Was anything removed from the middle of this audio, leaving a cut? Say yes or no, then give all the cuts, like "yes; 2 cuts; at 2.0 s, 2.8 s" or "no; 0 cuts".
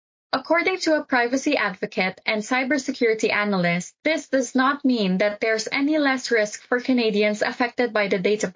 yes; 1 cut; at 4.0 s